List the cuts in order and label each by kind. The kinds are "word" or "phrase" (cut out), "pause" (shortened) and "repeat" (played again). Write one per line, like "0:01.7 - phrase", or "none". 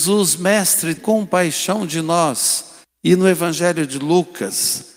0:01.0 - word
0:02.8 - pause